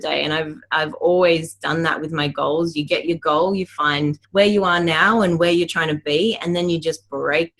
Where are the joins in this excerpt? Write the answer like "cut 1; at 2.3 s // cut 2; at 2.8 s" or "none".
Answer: cut 1; at 4.2 s